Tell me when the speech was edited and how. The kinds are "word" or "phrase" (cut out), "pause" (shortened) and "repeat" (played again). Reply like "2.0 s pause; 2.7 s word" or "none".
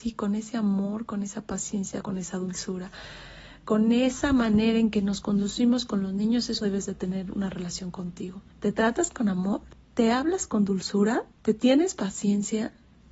2.0 s phrase; 6.6 s word; 8.5 s pause; 11.3 s pause

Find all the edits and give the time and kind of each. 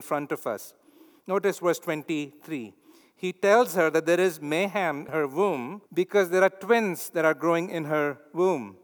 5.1 s word; 5.9 s pause

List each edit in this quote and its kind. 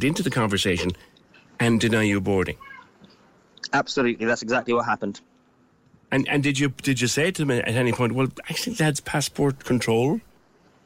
none

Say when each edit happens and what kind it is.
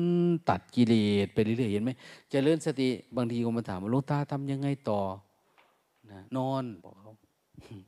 6.3 s pause; 6.8 s pause

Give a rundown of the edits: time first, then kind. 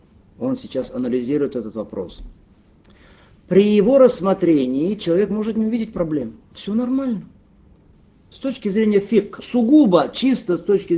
9.4 s word

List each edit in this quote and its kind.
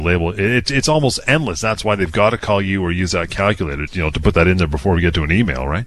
3.9 s word

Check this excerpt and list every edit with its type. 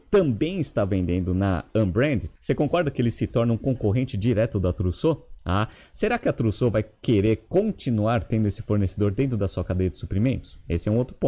none

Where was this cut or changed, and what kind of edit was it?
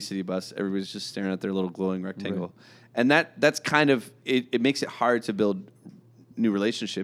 4.2 s word

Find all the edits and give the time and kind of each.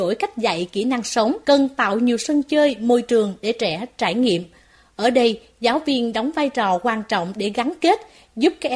1.4 s pause

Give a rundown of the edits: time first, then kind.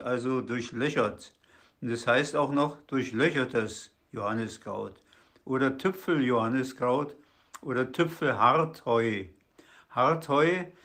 none

